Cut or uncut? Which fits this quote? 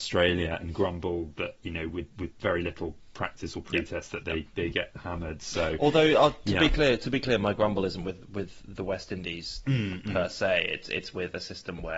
uncut